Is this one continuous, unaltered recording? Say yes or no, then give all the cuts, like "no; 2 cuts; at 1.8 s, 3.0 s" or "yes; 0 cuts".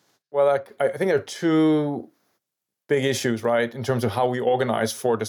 yes; 0 cuts